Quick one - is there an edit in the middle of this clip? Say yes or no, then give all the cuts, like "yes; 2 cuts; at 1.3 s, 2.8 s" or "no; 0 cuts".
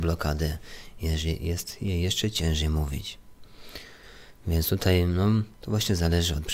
yes; 1 cut; at 5.5 s